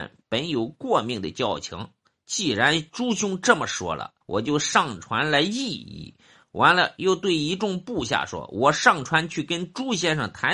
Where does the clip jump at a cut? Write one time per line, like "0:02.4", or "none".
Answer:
0:04.2